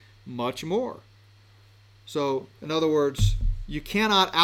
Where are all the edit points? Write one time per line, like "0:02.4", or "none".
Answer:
0:02.6